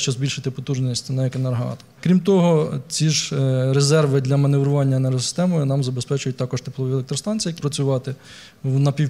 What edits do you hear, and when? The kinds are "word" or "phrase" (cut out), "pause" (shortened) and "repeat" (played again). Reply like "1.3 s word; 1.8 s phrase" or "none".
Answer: 7.6 s word